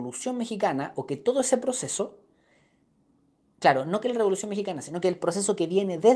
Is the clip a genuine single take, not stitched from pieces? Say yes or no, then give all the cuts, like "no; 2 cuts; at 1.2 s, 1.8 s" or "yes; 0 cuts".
yes; 0 cuts